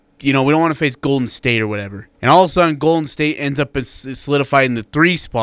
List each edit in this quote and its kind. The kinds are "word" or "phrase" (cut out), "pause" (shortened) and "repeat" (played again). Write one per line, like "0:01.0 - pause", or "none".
0:02.1 - pause